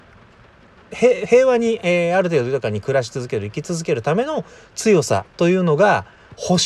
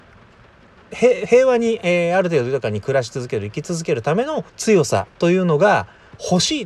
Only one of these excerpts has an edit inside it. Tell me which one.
second; 1 cut; at 4.5 s

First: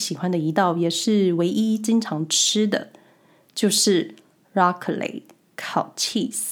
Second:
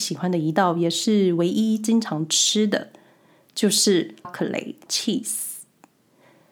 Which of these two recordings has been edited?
second; 2 cuts; at 4.2 s, 4.9 s

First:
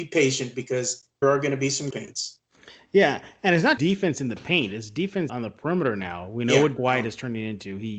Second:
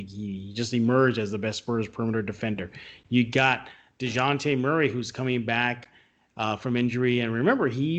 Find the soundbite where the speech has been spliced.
first; 5 cuts; at 1.2 s, 1.9 s, 3.8 s, 5.3 s, 6.8 s

